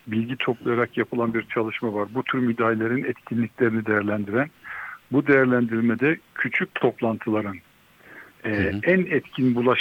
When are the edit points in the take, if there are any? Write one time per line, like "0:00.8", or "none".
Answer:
0:06.2
0:08.3